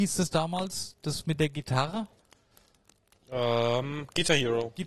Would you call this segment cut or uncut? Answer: uncut